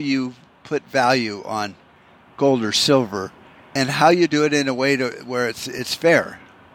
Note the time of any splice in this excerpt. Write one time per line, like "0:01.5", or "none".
0:03.8